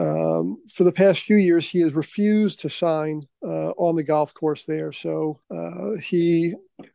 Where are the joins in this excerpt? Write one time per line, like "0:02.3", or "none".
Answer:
0:03.3
0:05.4

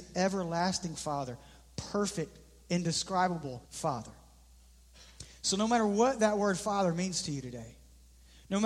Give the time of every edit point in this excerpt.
0:03.6

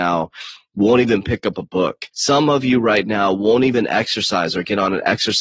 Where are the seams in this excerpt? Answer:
0:02.1

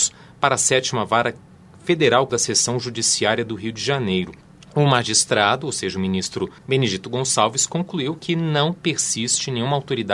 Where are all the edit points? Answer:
0:02.3
0:04.4
0:06.6

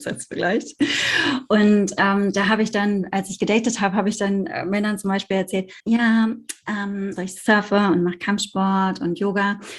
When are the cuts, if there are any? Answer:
0:05.8
0:07.2

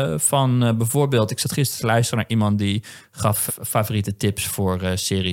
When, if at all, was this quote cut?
0:03.5

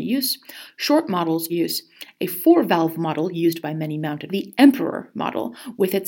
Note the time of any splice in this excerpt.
0:01.5
0:04.3

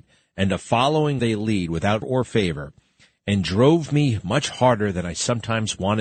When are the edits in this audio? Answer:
0:01.2
0:02.0

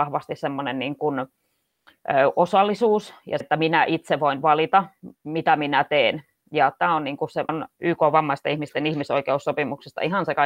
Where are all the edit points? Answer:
0:03.4
0:07.5

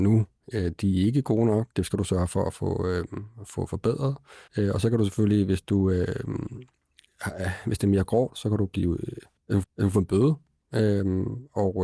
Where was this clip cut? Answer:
0:01.7
0:04.5
0:09.6

